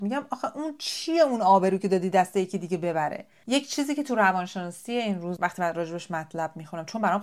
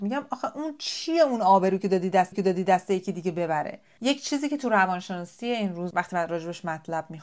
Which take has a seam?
second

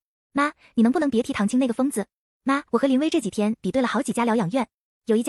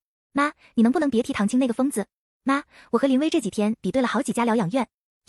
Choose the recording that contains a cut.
first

